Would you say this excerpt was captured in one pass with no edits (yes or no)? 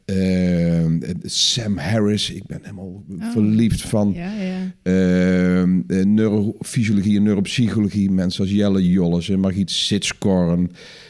yes